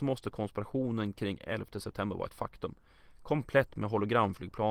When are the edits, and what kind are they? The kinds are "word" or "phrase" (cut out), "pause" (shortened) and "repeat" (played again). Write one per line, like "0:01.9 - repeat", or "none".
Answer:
none